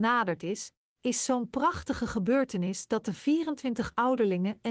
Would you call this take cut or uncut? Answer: uncut